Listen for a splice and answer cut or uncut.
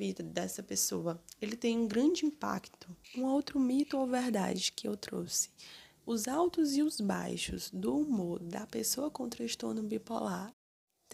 cut